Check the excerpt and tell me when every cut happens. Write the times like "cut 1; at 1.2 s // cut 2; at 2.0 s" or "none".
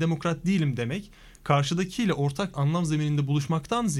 cut 1; at 2.5 s